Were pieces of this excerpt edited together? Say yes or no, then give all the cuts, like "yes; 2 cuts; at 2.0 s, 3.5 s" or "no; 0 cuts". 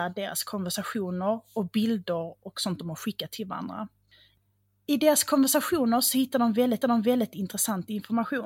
yes; 1 cut; at 6.8 s